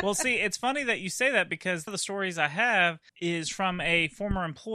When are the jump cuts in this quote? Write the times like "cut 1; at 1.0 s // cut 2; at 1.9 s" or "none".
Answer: cut 1; at 1.9 s // cut 2; at 3.1 s